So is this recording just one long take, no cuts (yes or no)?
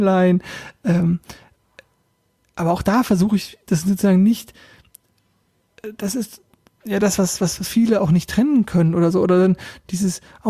yes